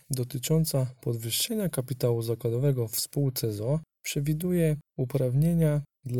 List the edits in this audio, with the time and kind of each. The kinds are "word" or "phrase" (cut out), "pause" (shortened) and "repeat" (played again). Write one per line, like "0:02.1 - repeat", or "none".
none